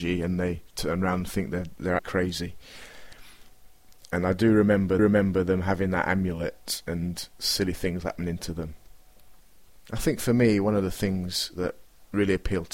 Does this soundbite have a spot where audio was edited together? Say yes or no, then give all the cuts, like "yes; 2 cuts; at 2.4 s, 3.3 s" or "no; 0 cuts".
yes; 2 cuts; at 2.0 s, 5.0 s